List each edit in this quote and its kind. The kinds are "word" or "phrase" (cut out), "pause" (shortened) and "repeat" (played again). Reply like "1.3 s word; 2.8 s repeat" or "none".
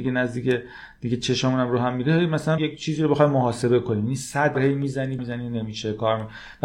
2.6 s word; 4.5 s word; 5.2 s word